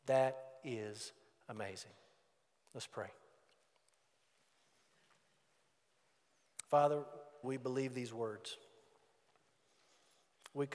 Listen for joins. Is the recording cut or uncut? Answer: cut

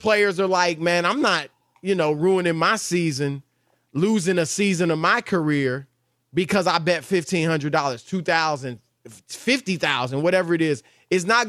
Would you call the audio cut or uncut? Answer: uncut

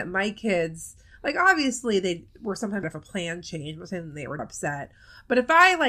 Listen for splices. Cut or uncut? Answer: cut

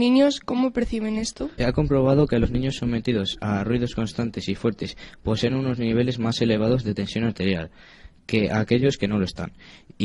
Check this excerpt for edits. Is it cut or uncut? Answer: uncut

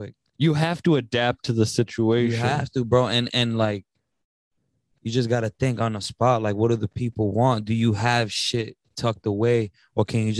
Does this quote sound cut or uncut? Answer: uncut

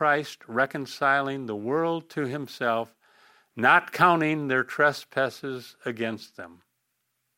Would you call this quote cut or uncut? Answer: uncut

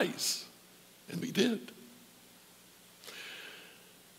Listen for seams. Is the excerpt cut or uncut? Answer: cut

